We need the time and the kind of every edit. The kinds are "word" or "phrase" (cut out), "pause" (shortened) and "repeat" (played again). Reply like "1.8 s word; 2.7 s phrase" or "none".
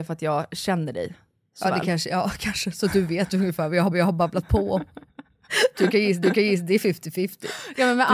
3.9 s repeat; 5.1 s pause; 6.2 s repeat